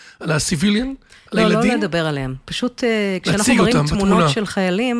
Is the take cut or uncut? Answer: uncut